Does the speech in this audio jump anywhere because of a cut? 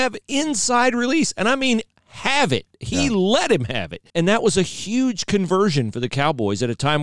yes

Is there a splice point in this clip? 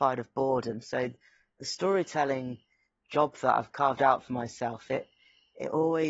no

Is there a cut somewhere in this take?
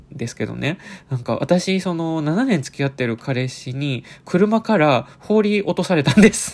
yes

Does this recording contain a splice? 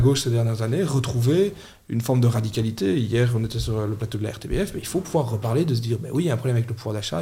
no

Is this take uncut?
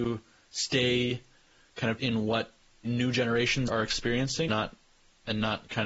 no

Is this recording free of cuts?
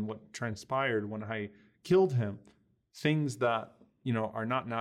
yes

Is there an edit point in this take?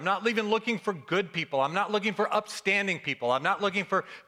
no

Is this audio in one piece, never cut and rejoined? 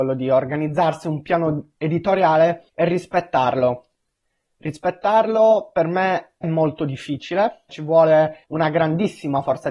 no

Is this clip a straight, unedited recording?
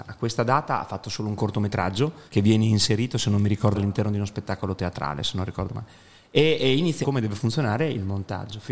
no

